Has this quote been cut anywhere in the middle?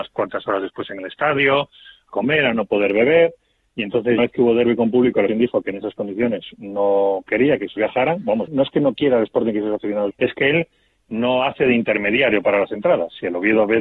yes; 6 cuts; at 2.1 s, 4.2 s, 5.3 s, 7.8 s, 8.5 s, 10.1 s

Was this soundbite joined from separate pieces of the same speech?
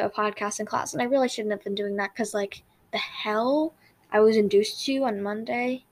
no; 0 cuts

